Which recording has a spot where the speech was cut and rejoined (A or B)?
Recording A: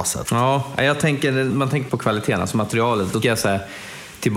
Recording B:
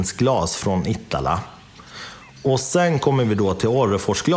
A